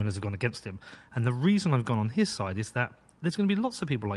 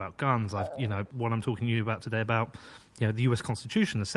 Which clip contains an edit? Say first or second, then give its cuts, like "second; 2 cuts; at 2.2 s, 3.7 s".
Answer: second; 1 cut; at 1.1 s